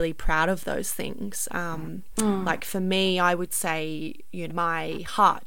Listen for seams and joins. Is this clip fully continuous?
no; 1 cut; at 4.5 s

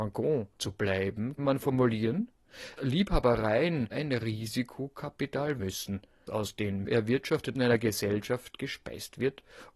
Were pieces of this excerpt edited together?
yes; 7 cuts; at 1.4 s, 2.8 s, 3.9 s, 5.6 s, 6.3 s, 6.8 s, 7.5 s

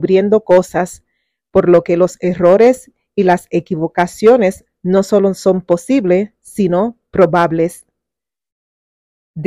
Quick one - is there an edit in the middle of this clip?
no; 0 cuts

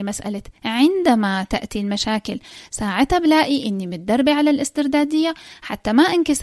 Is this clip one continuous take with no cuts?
yes; 0 cuts

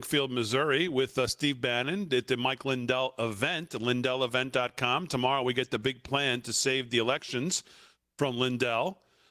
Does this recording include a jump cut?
no; 0 cuts

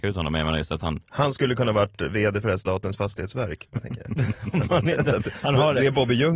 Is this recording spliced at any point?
no; 0 cuts

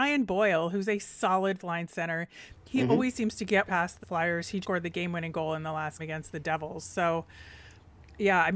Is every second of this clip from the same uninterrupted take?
no; 5 cuts; at 1.6 s, 3.7 s, 4.0 s, 4.6 s, 6.0 s

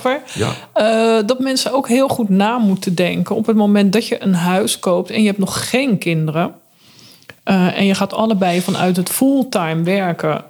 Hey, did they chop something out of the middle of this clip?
no; 0 cuts

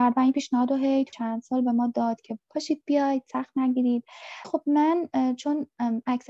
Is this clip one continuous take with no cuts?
no; 2 cuts; at 1.1 s, 4.4 s

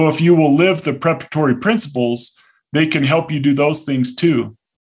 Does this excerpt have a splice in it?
no; 0 cuts

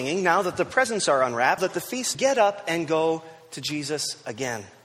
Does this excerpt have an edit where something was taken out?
yes; 2 cuts; at 1.6 s, 2.1 s

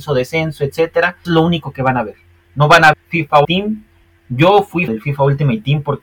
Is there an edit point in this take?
yes; 4 cuts; at 1.2 s, 2.9 s, 3.4 s, 4.9 s

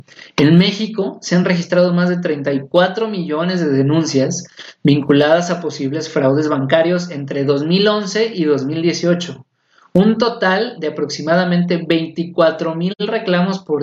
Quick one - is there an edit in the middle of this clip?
no; 0 cuts

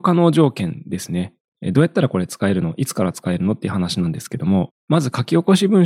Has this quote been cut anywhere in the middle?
yes; 1 cut; at 4.8 s

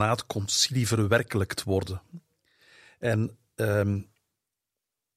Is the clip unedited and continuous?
yes; 0 cuts

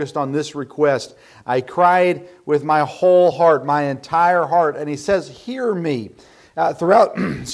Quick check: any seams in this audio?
no; 0 cuts

